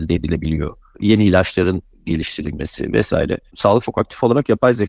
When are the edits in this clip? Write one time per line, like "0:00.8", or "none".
0:03.8